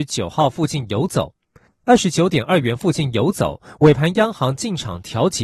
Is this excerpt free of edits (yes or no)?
no